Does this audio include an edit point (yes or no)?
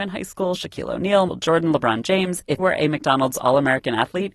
yes